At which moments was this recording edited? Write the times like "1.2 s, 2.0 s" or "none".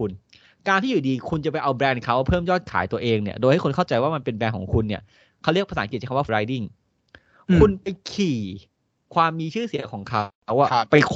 6.3 s